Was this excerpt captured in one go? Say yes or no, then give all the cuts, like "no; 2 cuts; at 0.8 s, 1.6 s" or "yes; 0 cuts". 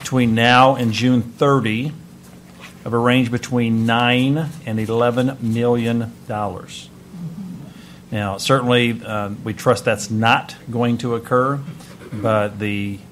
yes; 0 cuts